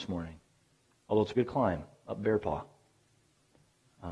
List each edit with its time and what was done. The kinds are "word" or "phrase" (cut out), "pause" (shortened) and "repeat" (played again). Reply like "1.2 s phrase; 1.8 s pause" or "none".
1.3 s word